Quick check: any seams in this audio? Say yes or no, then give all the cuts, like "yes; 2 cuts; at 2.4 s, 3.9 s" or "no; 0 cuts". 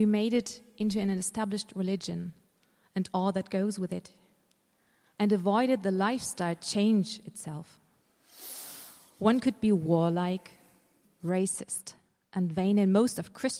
yes; 1 cut; at 11.0 s